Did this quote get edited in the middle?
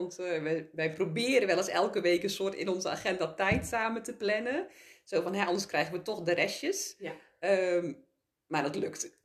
no; 0 cuts

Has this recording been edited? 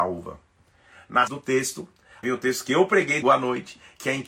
yes; 3 cuts; at 1.3 s, 2.2 s, 3.2 s

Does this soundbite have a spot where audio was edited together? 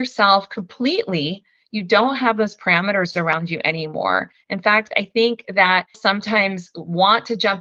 yes; 1 cut; at 5.9 s

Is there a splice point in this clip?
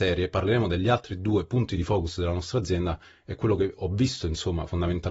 no; 0 cuts

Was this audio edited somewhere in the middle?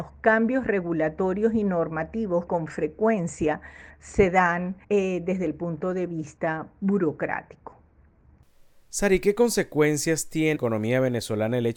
yes; 3 cuts; at 2.5 s, 4.8 s, 10.6 s

